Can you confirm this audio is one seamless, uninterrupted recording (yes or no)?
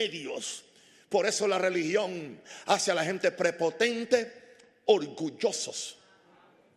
yes